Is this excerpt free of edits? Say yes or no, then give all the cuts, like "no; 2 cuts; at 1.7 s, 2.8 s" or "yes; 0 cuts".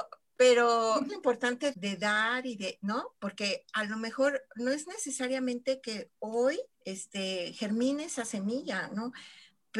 no; 3 cuts; at 1.1 s, 1.7 s, 6.7 s